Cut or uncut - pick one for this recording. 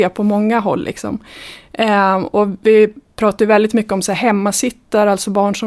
uncut